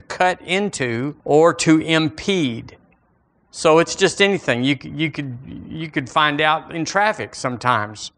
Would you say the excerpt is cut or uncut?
cut